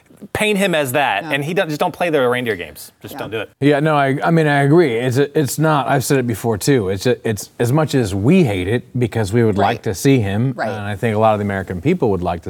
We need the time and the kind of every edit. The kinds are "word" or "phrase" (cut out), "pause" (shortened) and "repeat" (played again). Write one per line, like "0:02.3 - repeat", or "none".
0:03.5 - pause